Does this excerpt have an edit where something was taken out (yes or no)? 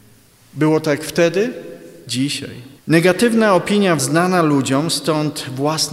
yes